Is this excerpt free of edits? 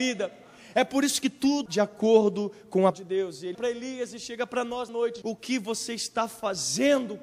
no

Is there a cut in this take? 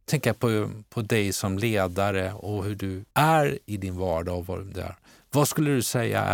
yes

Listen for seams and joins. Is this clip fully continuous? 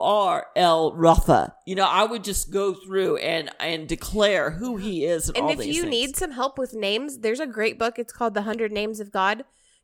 yes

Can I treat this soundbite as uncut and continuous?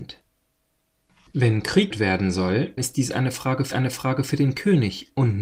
no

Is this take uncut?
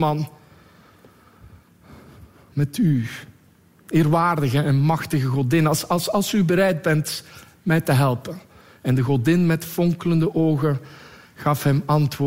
yes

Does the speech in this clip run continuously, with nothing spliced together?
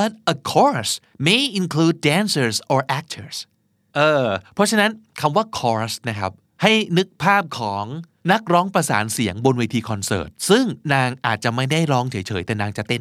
yes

